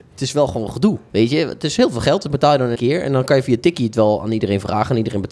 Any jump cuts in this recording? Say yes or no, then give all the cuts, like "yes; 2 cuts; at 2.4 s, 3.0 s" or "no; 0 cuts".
yes; 1 cut; at 2.8 s